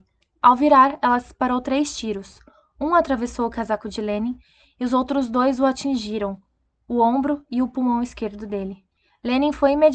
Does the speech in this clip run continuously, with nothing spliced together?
yes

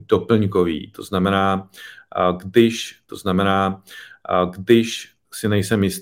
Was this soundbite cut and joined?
yes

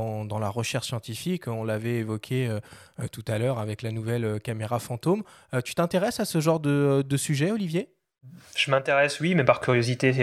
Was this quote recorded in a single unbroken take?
yes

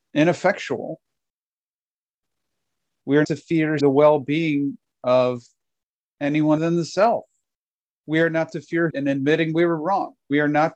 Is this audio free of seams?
no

